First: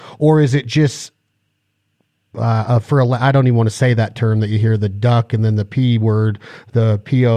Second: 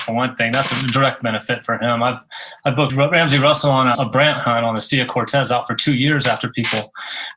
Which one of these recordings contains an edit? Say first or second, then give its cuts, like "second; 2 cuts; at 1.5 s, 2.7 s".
second; 2 cuts; at 2.9 s, 3.9 s